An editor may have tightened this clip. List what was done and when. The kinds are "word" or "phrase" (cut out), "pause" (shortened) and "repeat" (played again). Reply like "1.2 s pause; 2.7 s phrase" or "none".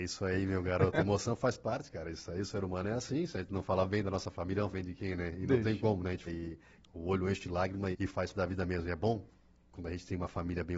4.7 s word; 6.3 s word; 7.9 s word; 8.3 s word